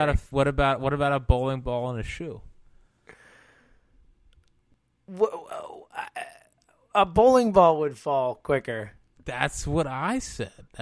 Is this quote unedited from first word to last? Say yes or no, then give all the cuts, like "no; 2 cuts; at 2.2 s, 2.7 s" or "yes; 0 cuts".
yes; 0 cuts